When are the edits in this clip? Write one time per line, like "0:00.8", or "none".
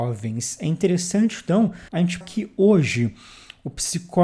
0:01.9
0:02.2